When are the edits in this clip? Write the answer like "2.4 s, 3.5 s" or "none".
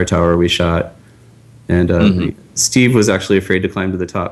none